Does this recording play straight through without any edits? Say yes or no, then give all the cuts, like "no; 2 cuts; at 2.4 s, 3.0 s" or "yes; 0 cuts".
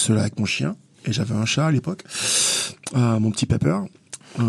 yes; 0 cuts